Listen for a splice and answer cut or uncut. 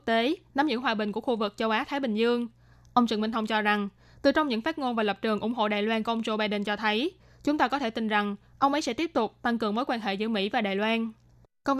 uncut